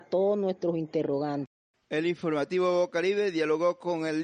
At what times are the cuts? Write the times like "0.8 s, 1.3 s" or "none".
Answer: none